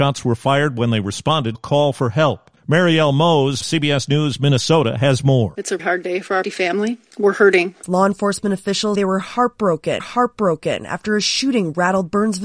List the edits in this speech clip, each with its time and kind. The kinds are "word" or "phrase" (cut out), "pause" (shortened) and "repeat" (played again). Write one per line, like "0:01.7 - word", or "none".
0:01.5 - word
0:03.6 - word
0:05.8 - word
0:06.4 - phrase
0:08.9 - word
0:10.0 - repeat

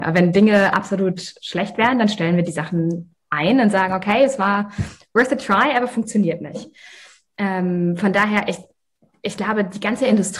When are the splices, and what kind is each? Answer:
none

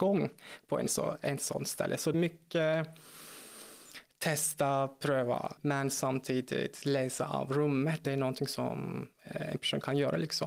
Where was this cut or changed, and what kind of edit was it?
0:02.1 - word
0:05.6 - word
0:08.0 - word
0:09.1 - pause

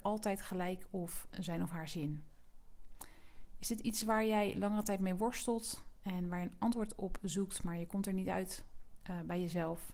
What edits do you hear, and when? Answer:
none

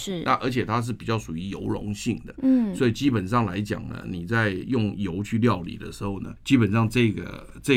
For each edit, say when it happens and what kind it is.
0:06.4 - pause

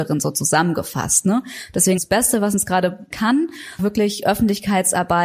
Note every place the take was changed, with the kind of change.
0:02.0 - word
0:03.1 - word
0:03.8 - word

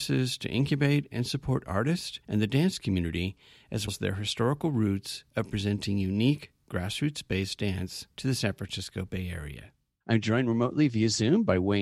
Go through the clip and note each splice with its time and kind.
0:03.9 - word
0:08.1 - pause

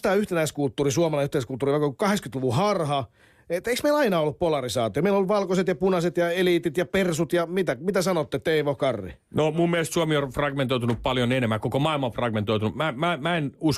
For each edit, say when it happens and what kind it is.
none

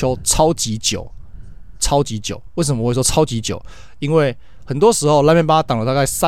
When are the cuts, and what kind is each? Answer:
0:01.8 - word

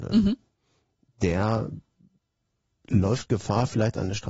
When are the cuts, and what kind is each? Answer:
none

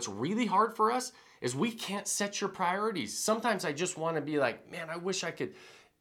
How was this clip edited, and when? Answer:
none

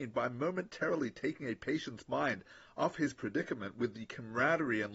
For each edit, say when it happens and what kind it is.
none

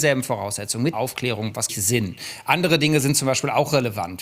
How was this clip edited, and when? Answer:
0:00.9 - word
0:01.7 - phrase

